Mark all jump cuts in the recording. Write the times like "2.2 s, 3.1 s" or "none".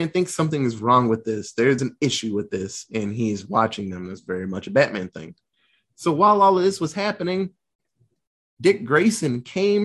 1.8 s